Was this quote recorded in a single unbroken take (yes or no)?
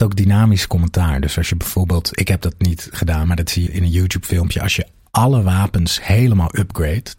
no